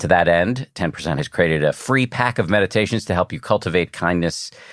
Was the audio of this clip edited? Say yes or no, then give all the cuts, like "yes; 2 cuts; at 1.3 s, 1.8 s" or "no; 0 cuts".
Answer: yes; 1 cut; at 1.2 s